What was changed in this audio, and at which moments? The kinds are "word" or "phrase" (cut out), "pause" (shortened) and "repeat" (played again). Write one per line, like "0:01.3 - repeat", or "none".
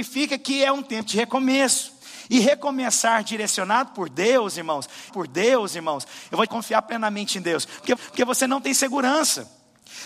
0:05.1 - repeat
0:06.5 - phrase
0:08.0 - repeat